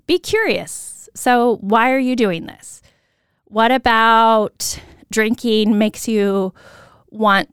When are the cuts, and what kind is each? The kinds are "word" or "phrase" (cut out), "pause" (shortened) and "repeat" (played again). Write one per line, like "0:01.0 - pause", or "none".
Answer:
none